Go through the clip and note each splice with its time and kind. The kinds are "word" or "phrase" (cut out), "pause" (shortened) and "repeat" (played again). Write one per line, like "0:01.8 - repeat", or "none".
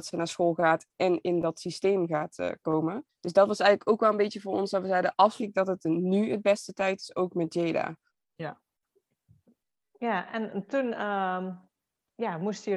0:03.1 - pause
0:05.4 - phrase
0:08.1 - pause